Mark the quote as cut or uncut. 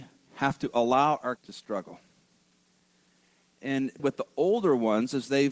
cut